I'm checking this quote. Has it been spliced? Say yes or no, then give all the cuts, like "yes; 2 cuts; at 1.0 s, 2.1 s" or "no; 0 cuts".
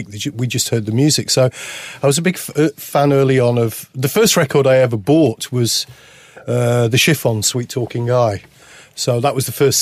no; 0 cuts